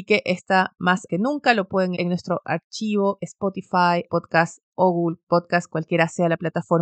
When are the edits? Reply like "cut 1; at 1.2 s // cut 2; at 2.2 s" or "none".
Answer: cut 1; at 1.1 s // cut 2; at 2.0 s // cut 3; at 3.2 s // cut 4; at 4.1 s